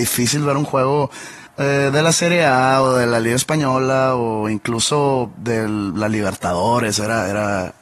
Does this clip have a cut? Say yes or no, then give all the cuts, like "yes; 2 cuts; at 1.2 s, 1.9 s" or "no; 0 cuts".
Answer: yes; 1 cut; at 1.5 s